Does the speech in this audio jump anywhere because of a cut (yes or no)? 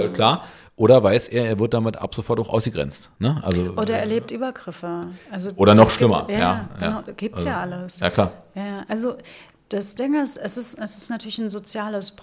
no